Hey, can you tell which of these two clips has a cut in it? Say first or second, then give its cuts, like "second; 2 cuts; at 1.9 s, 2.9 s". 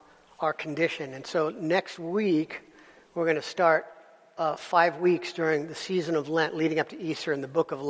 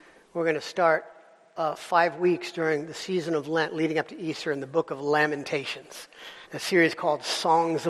second; 1 cut; at 6.4 s